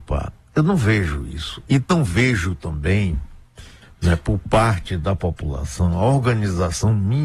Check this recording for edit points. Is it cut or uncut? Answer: uncut